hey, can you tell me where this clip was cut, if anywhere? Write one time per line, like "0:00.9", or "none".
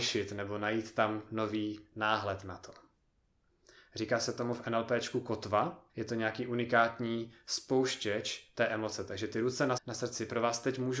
0:05.9
0:09.8